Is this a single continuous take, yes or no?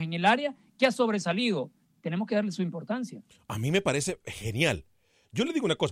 yes